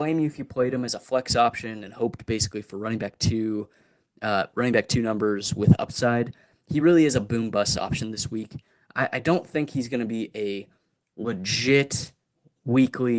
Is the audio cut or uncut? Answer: uncut